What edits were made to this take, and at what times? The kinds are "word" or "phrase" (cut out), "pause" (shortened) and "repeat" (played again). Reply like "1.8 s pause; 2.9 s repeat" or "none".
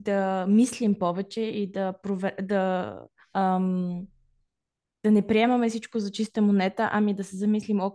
3.2 s pause